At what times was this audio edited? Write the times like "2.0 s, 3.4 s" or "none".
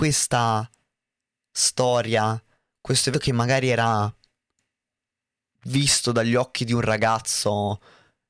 3.1 s